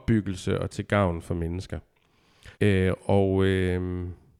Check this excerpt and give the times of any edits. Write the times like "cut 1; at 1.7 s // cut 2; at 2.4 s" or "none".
cut 1; at 2.5 s